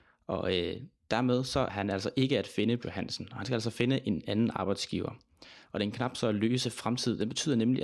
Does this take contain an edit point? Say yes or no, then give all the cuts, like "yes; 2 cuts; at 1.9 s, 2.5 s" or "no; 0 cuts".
yes; 2 cuts; at 1.7 s, 2.8 s